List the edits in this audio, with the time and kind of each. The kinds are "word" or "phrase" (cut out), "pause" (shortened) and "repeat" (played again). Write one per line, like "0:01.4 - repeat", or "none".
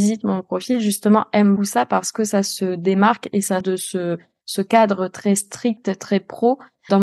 0:01.6 - word
0:03.6 - word